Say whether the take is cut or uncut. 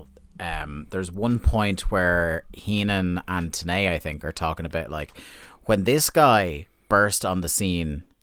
uncut